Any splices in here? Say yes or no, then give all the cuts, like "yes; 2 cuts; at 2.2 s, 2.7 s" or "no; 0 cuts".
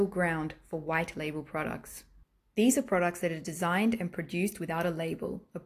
no; 0 cuts